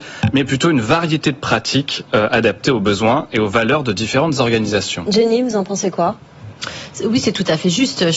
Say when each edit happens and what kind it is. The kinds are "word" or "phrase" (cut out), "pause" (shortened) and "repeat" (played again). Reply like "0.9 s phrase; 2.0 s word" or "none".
none

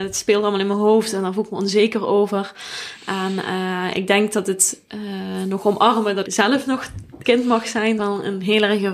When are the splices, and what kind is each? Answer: 6.2 s word; 7.2 s word; 8.0 s phrase

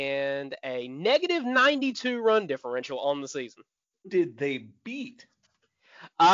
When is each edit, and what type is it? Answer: 4.0 s word

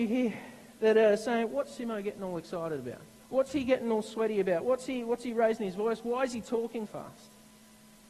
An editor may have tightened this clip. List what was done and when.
3.2 s pause; 6.9 s word

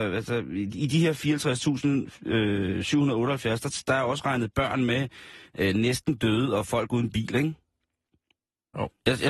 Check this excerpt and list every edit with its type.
none

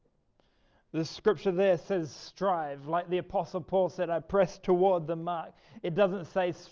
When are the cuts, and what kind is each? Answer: none

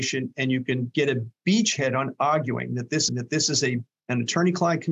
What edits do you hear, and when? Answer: 3.1 s repeat

